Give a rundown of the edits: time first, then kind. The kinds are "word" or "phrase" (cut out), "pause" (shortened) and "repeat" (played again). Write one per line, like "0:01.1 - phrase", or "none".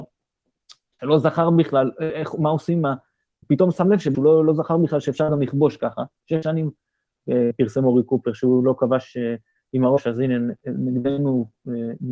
0:04.1 - phrase